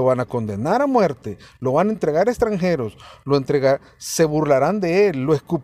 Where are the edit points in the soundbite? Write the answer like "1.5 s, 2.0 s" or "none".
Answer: none